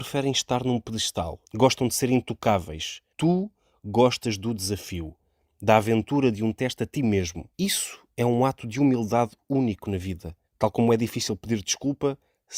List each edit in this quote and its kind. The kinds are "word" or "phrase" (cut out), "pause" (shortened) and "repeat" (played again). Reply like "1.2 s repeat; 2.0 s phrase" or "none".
1.4 s pause; 3.1 s pause; 7.5 s pause; 10.5 s pause

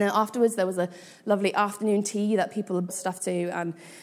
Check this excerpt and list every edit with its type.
2.9 s word

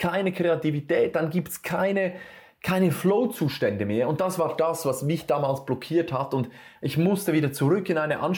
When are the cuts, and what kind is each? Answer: none

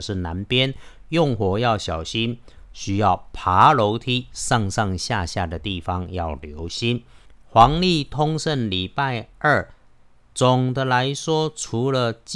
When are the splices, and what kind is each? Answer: none

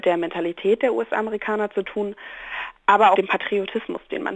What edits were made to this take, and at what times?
3.1 s phrase

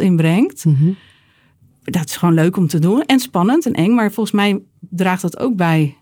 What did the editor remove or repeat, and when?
none

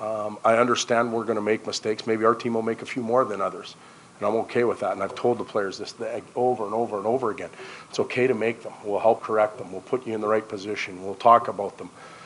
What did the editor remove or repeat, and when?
9.2 s word

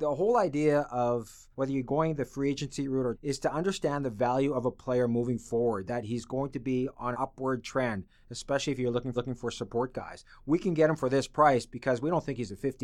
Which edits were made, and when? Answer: 1.5 s pause; 3.1 s word; 7.1 s word; 9.1 s repeat

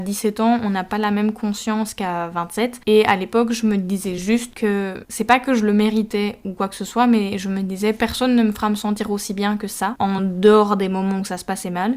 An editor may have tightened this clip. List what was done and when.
none

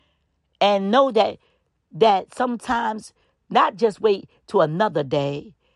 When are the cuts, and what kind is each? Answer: none

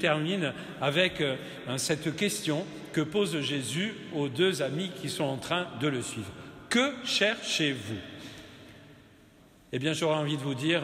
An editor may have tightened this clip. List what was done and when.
none

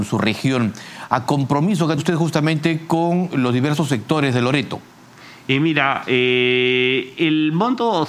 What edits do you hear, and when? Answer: 1.3 s phrase; 2.0 s word

